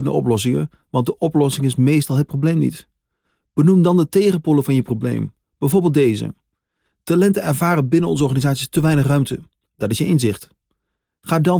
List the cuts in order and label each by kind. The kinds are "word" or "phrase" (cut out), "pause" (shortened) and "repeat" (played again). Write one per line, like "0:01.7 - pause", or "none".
none